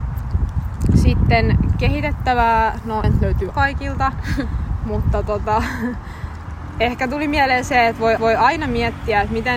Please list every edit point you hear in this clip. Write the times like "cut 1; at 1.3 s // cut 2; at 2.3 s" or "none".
cut 1; at 3.0 s // cut 2; at 3.5 s // cut 3; at 8.2 s